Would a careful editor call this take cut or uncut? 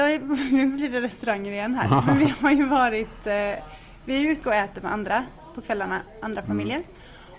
cut